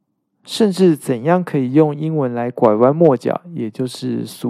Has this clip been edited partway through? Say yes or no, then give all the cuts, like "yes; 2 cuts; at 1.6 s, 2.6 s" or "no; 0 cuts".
no; 0 cuts